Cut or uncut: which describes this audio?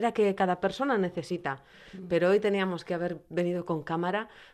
uncut